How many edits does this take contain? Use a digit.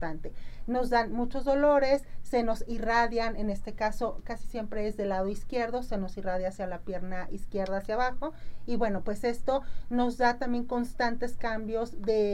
0